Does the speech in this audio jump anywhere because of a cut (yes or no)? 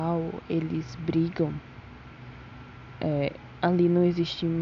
no